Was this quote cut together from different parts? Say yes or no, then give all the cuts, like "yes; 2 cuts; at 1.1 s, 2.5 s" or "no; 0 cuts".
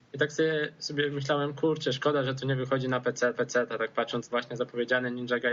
yes; 2 cuts; at 3.3 s, 4.3 s